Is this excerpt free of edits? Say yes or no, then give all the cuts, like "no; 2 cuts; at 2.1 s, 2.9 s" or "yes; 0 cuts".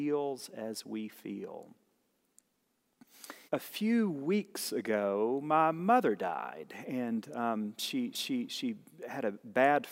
no; 2 cuts; at 3.5 s, 8.1 s